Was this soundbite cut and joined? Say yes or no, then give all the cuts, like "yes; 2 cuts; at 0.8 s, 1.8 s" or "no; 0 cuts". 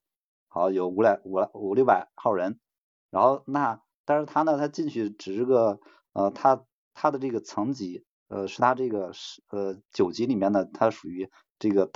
no; 0 cuts